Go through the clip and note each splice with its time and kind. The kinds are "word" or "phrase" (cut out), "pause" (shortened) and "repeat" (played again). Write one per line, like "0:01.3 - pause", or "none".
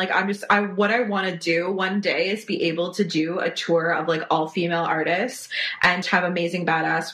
0:06.0 - word